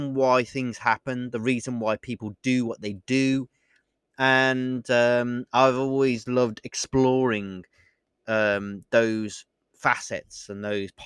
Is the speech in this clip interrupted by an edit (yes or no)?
no